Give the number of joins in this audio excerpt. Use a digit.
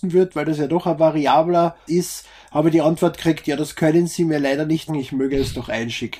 2